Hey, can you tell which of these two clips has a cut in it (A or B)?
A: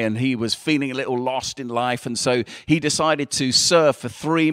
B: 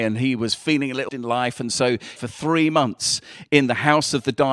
B